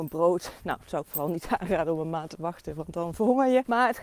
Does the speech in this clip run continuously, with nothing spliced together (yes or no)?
yes